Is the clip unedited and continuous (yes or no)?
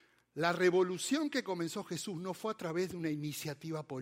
yes